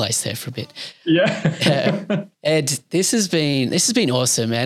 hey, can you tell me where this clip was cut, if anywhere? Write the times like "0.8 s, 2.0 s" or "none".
none